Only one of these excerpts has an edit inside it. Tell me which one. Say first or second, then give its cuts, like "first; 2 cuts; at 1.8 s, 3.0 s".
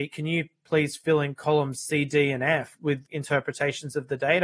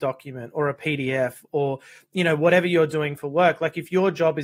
first; 2 cuts; at 2.8 s, 3.1 s